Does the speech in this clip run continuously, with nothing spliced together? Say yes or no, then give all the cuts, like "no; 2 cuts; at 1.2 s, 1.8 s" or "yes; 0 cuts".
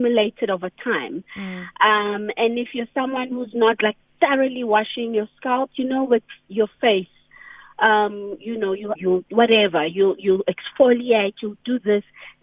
no; 1 cut; at 8.9 s